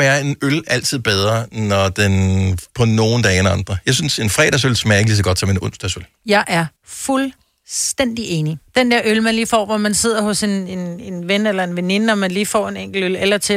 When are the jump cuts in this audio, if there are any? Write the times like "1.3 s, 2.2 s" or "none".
2.7 s, 6.8 s, 8.7 s